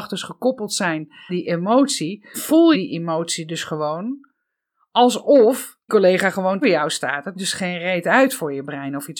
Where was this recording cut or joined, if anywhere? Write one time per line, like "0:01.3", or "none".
0:01.3
0:02.3
0:02.7
0:05.9
0:06.6
0:07.3

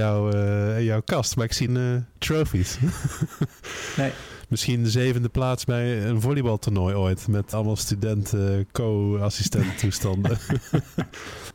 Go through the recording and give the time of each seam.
0:01.7
0:07.5

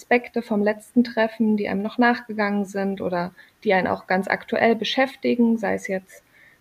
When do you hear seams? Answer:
none

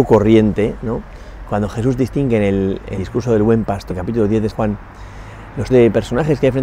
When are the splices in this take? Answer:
0:03.0
0:03.9
0:04.5
0:05.7

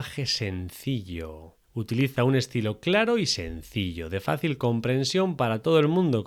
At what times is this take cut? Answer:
0:01.6

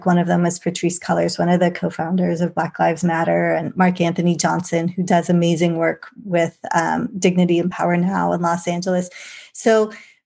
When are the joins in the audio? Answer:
none

